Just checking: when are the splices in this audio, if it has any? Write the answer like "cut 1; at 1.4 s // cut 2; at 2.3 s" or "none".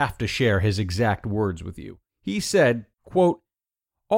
cut 1; at 2.1 s